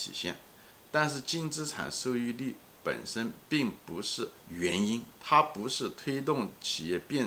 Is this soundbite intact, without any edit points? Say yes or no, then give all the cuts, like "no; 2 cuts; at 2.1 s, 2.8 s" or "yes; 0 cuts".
no; 3 cuts; at 3.5 s, 4.4 s, 5.2 s